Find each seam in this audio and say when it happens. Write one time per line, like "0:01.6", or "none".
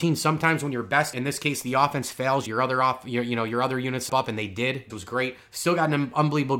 0:01.1
0:02.5
0:04.1
0:04.9

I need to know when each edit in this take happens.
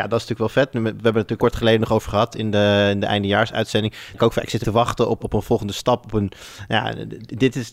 0:01.4
0:02.3
0:04.1
0:04.6
0:05.2

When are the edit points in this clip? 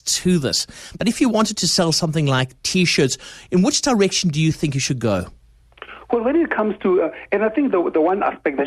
none

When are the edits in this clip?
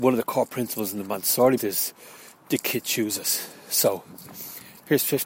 0:01.6
0:02.3

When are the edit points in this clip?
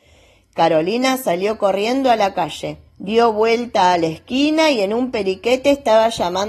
0:02.9

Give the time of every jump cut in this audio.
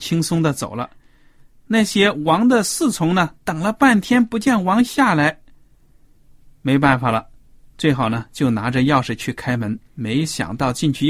none

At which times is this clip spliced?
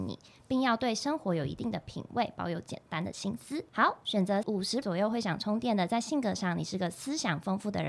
0:04.4
0:04.8

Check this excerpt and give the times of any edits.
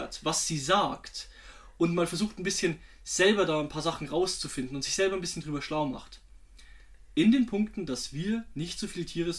none

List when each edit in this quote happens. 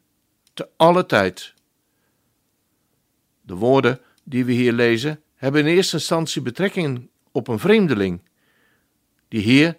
none

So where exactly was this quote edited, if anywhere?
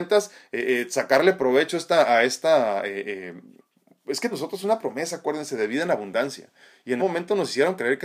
0:03.6
0:04.3
0:07.0

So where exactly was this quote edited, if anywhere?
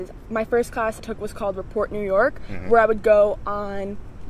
0:01.0

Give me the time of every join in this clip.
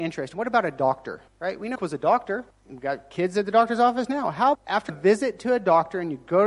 0:01.3
0:01.8
0:02.5
0:04.5
0:04.9

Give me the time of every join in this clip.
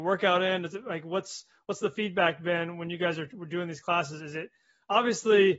none

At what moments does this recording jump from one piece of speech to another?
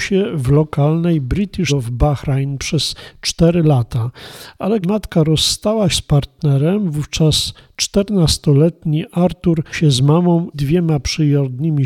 0:01.7
0:04.8
0:05.9
0:09.7
0:10.5

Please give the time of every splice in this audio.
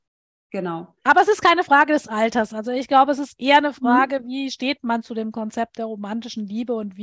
none

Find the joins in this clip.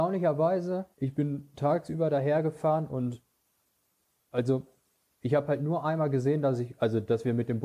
0:00.9

